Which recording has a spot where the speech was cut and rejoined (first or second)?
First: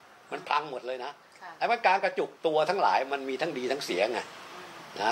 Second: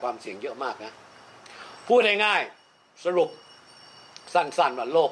first